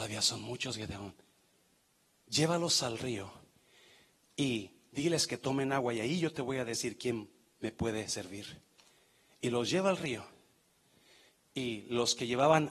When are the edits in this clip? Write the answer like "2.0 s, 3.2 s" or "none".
1.8 s